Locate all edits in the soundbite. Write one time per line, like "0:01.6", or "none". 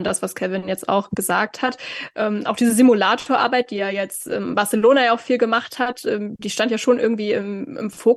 none